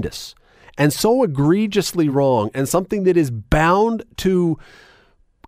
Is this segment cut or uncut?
uncut